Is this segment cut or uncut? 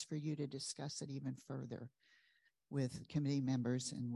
uncut